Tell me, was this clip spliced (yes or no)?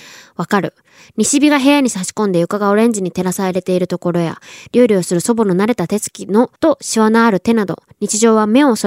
yes